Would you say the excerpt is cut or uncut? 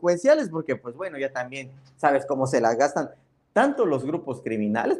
uncut